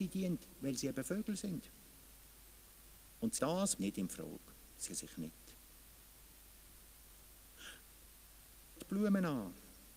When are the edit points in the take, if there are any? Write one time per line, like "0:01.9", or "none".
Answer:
0:03.4
0:03.8
0:04.9
0:08.8